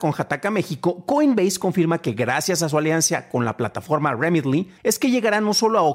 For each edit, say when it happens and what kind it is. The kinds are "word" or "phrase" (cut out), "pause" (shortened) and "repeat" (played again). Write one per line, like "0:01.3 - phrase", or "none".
0:04.8 - pause